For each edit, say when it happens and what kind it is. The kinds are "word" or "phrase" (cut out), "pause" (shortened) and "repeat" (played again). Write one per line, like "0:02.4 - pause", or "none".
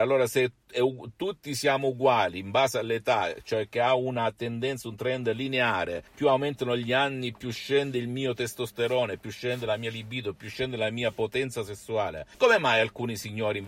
0:06.1 - pause
0:12.3 - pause